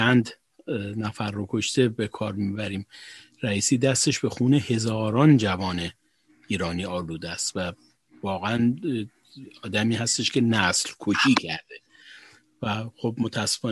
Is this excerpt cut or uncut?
uncut